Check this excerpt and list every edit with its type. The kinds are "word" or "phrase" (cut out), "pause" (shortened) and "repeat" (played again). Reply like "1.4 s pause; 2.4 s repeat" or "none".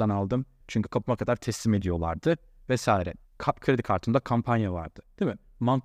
none